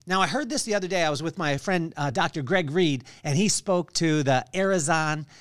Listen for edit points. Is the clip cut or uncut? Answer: uncut